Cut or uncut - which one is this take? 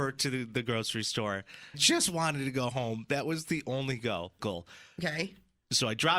cut